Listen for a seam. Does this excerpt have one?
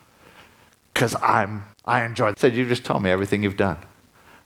yes; 2 cuts; at 1.7 s, 2.3 s

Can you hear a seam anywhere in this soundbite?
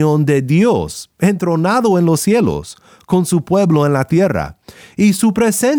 no; 0 cuts

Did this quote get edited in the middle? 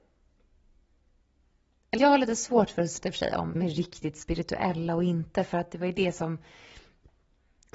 yes; 3 cuts; at 2.0 s, 3.0 s, 3.5 s

